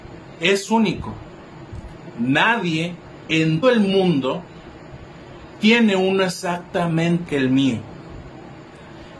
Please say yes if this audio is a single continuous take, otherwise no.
no